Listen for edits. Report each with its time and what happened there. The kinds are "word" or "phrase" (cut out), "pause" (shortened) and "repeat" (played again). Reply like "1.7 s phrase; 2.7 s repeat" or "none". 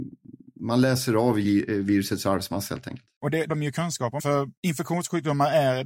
3.5 s word; 4.2 s phrase